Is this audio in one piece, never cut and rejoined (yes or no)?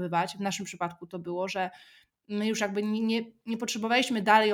yes